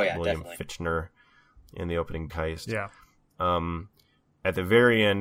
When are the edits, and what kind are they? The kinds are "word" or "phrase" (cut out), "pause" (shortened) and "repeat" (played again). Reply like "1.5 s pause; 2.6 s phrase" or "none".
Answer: 2.3 s word